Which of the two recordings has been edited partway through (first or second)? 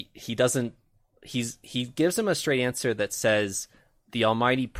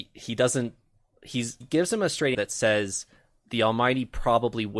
second